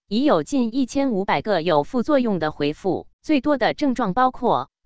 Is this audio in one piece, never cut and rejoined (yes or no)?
no